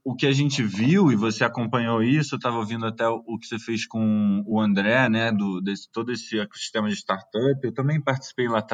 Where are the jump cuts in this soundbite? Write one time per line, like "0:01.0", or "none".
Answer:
none